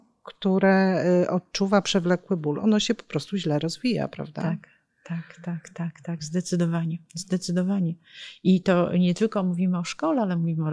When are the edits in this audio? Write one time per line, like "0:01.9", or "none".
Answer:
none